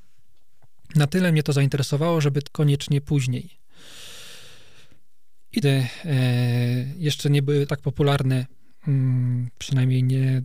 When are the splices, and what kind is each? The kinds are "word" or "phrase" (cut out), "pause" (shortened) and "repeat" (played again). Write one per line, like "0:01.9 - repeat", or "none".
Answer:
0:02.5 - word
0:05.6 - phrase
0:07.7 - word